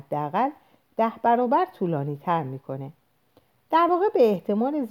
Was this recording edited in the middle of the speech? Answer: no; 0 cuts

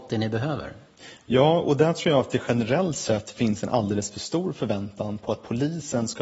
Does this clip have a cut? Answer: no; 0 cuts

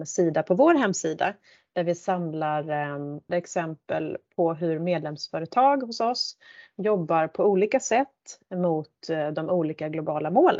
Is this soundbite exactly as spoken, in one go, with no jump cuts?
no; 1 cut; at 3.3 s

